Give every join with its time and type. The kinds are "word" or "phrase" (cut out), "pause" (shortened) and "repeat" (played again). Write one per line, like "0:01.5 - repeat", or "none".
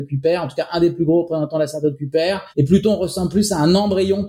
0:02.5 - pause